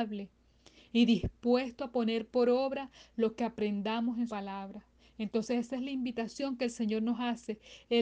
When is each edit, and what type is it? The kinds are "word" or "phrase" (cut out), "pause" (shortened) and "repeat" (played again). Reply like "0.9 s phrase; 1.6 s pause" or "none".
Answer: 4.3 s word